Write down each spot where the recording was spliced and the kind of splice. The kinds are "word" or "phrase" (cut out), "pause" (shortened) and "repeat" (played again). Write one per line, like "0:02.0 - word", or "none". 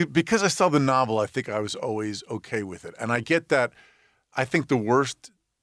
none